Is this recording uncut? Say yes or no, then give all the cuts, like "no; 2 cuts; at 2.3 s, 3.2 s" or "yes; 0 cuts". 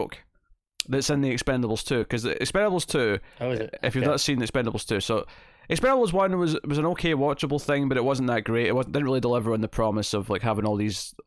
yes; 0 cuts